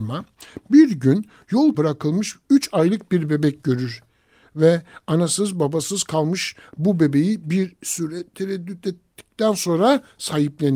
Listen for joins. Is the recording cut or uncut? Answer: cut